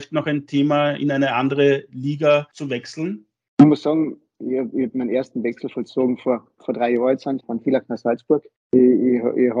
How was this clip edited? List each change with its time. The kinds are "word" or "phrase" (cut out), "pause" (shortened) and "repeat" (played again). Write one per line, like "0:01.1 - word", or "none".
0:07.4 - word